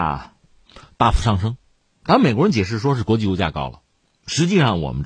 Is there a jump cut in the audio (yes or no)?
no